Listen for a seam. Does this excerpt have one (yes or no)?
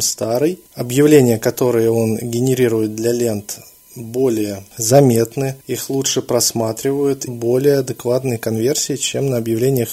yes